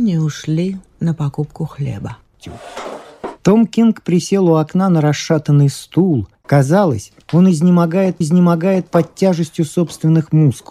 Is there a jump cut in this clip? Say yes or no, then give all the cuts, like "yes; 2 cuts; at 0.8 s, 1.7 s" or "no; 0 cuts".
yes; 2 cuts; at 7.2 s, 8.2 s